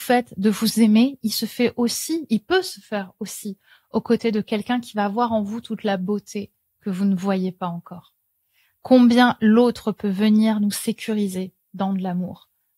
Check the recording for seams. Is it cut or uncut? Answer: uncut